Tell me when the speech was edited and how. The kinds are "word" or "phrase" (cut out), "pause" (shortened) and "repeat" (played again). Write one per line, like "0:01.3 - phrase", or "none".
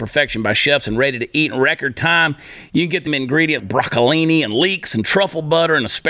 0:03.1 - phrase
0:03.6 - word